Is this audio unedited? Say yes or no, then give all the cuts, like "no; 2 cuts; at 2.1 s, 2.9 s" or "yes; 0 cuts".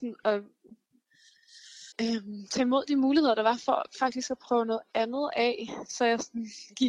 no; 1 cut; at 1.9 s